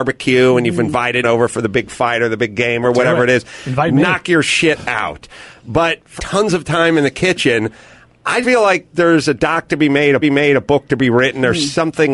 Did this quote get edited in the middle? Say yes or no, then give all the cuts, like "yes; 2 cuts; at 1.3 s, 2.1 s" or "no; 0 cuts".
yes; 4 cuts; at 1.2 s, 6.2 s, 8.4 s, 10.2 s